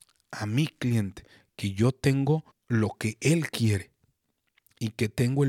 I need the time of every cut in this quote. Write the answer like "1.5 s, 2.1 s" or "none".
2.5 s